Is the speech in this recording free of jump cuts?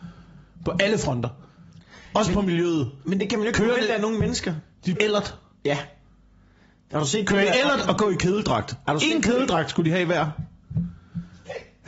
no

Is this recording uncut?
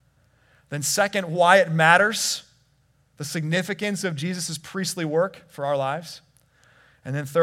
yes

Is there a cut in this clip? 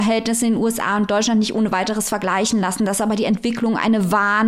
no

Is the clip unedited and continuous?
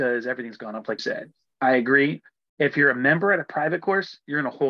no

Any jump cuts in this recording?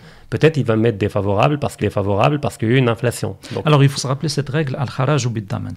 yes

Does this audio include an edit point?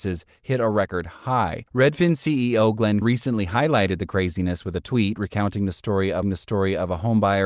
yes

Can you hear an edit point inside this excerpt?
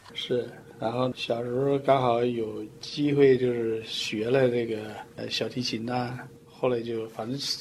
yes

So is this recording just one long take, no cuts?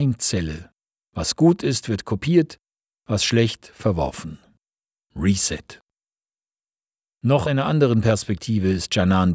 no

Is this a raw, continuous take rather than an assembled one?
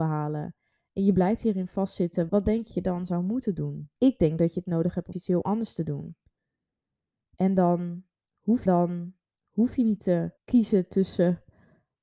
no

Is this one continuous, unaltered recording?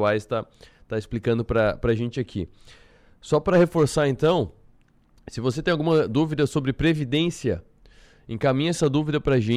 yes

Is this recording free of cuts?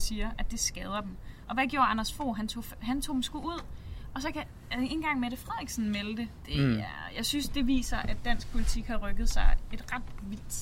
yes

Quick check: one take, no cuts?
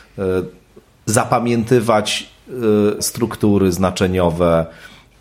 no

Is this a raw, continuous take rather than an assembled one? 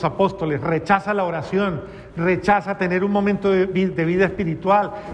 yes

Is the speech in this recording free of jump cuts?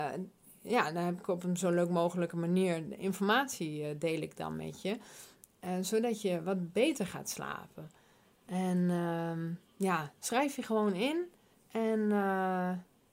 yes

